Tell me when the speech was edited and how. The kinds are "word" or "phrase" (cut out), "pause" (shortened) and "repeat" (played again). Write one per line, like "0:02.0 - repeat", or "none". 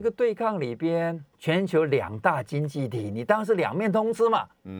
0:01.3 - pause